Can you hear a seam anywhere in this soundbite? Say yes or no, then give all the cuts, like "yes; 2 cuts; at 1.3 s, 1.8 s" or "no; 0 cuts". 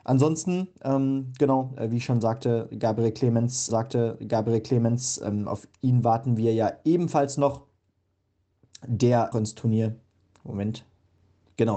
yes; 2 cuts; at 3.7 s, 9.3 s